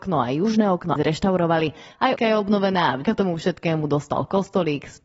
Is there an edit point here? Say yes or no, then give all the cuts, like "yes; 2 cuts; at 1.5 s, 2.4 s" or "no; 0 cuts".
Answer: yes; 3 cuts; at 1.0 s, 2.2 s, 3.0 s